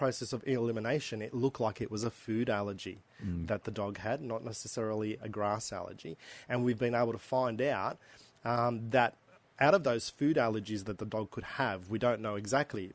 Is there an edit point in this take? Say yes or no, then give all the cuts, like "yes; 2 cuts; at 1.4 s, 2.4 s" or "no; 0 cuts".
no; 0 cuts